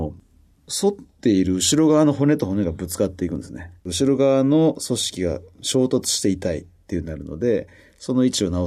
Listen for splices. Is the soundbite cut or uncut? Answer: cut